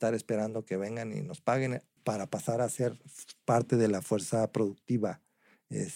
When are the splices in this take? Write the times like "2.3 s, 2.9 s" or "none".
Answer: 2.0 s